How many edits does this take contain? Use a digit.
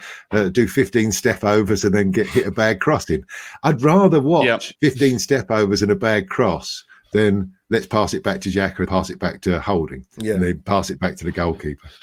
3